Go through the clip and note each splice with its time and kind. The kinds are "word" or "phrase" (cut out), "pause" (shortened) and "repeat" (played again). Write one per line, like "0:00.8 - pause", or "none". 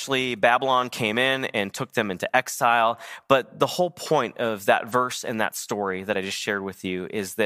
none